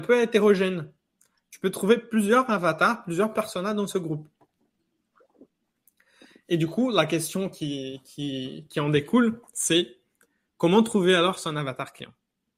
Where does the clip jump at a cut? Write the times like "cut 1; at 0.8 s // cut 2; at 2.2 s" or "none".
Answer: none